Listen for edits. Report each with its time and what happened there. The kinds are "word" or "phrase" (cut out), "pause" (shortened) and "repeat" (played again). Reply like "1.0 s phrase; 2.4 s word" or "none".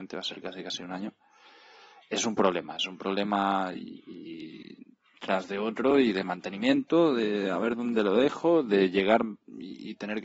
none

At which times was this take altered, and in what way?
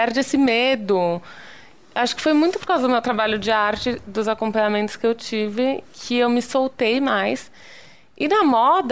none

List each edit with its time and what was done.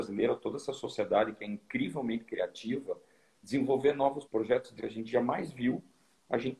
4.2 s word; 4.8 s word

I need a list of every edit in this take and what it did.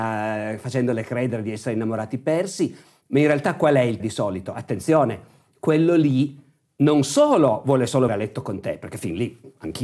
4.0 s word; 8.1 s word

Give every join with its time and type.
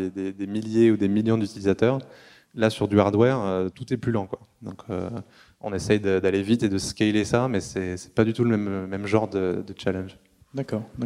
none

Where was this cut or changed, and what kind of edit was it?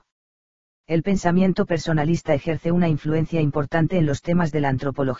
none

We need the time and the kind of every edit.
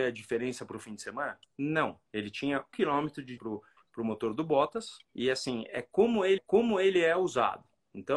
2.1 s pause; 2.7 s word; 3.4 s word; 5.0 s pause; 6.4 s repeat

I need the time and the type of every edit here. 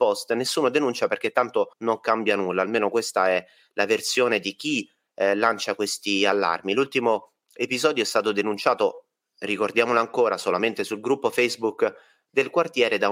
1.7 s pause

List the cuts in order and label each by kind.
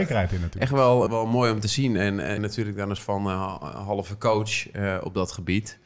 1.1 s word; 2.4 s phrase; 3.0 s word

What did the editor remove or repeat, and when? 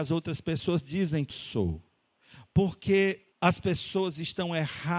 1.3 s word; 3.3 s pause

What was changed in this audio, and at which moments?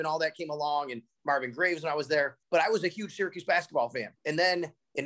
2.4 s pause; 4.2 s pause

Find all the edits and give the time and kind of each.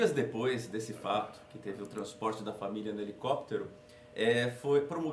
none

